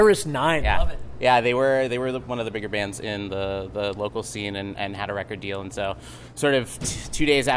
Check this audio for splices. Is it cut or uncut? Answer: uncut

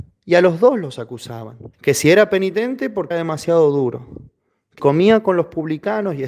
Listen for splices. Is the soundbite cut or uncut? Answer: cut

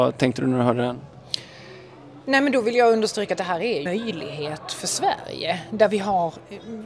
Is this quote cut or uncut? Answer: cut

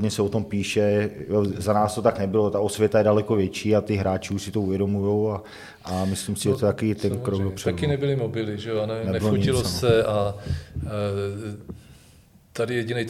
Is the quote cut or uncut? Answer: uncut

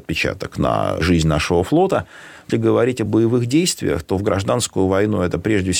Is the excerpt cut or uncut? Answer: cut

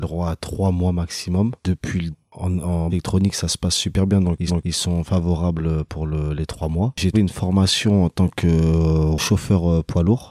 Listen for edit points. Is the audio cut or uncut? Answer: cut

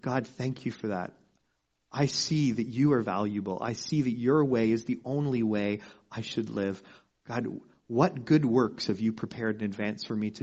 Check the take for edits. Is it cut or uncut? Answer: uncut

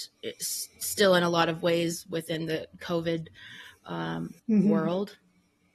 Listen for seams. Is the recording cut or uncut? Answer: cut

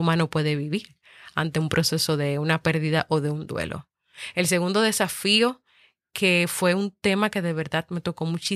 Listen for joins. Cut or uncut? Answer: uncut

